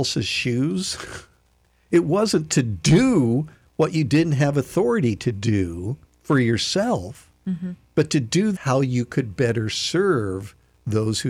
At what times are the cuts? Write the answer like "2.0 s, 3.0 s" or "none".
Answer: 6.1 s, 8.6 s

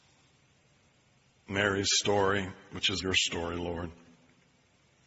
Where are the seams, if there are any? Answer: 3.0 s

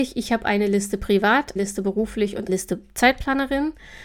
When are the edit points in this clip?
1.6 s, 2.5 s

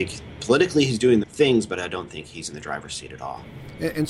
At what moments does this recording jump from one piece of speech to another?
1.2 s

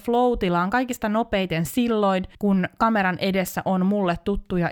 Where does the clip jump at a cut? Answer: 2.3 s

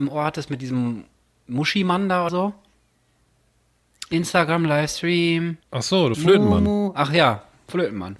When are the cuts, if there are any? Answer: 1.2 s, 2.3 s, 5.6 s, 6.1 s

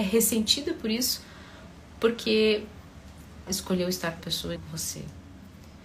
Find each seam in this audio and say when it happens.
3.5 s, 4.2 s, 4.6 s

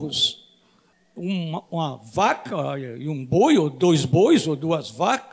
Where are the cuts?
0.9 s

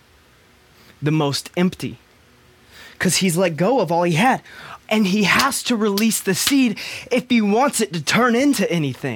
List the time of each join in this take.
4.8 s

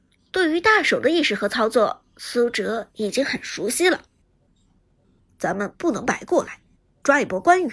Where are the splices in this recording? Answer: none

